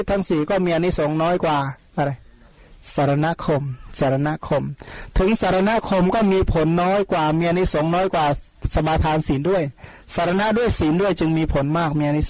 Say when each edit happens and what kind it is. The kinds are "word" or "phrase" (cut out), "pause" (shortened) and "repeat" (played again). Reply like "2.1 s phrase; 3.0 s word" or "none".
1.8 s pause

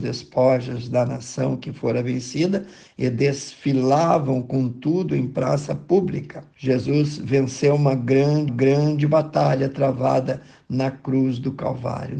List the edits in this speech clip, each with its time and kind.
6.5 s pause; 8.5 s repeat

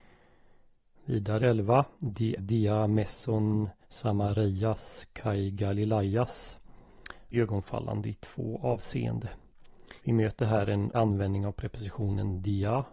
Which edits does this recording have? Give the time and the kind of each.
1.4 s phrase; 2.4 s word; 3.8 s pause; 7.3 s word; 10.0 s pause; 10.9 s word

